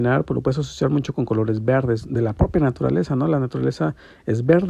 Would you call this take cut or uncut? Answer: uncut